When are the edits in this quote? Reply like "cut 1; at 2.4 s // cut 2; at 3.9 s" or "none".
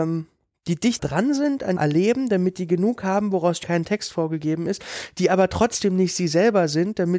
cut 1; at 1.0 s // cut 2; at 1.8 s // cut 3; at 3.6 s